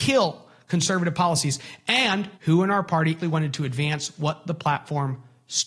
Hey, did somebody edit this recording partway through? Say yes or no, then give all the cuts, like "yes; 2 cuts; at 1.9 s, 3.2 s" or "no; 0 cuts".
yes; 2 cuts; at 2.4 s, 3.2 s